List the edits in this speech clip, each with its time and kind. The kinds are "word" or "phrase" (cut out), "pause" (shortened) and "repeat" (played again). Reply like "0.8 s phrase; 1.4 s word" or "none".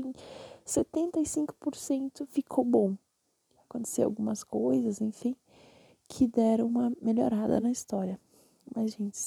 none